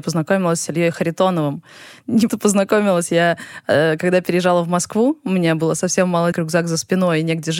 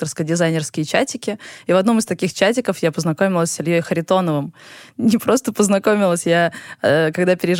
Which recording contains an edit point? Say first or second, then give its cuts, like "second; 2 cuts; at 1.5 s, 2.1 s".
first; 2 cuts; at 2.3 s, 6.3 s